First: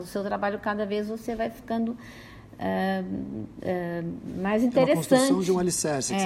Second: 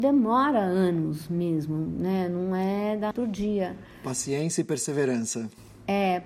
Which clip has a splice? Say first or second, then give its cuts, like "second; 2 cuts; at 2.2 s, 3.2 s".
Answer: second; 1 cut; at 3.1 s